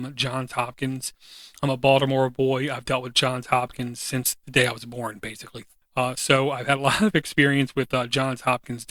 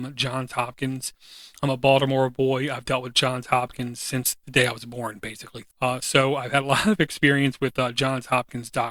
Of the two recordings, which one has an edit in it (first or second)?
second